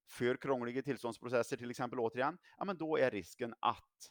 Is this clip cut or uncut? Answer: uncut